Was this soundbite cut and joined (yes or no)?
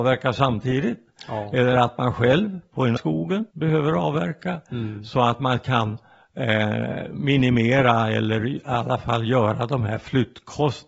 yes